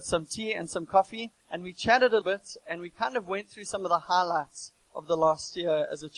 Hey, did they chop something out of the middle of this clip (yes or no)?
yes